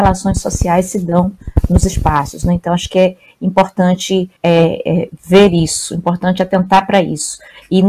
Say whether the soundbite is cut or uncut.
cut